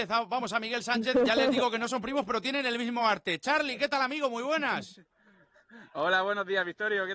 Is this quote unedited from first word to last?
yes; 0 cuts

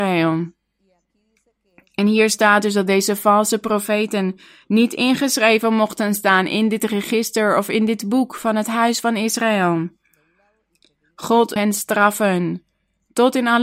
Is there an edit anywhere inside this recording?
yes; 1 cut; at 11.6 s

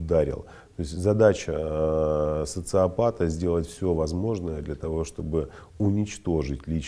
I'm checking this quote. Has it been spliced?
no; 0 cuts

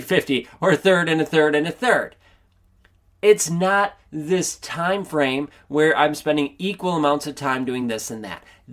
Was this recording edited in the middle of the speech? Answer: no; 0 cuts

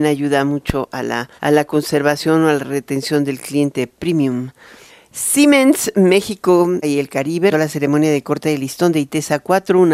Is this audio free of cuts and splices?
no; 4 cuts; at 1.4 s, 4.9 s, 6.8 s, 7.5 s

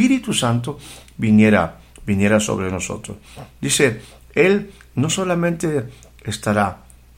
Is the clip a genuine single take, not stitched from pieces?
yes; 0 cuts

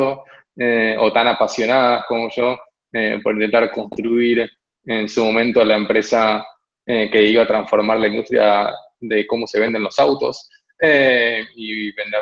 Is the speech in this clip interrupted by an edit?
no; 0 cuts

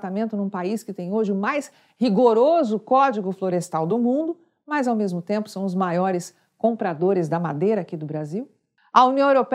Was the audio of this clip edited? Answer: no; 0 cuts

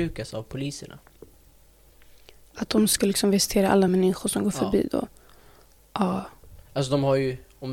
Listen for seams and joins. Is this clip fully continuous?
yes; 0 cuts

